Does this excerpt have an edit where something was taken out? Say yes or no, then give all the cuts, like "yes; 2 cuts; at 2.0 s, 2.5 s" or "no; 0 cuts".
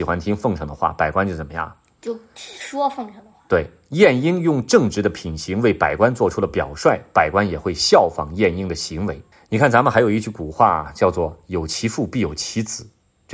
yes; 1 cut; at 9.3 s